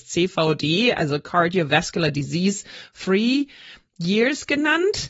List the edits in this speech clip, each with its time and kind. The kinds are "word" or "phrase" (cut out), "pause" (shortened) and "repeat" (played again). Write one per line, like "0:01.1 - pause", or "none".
none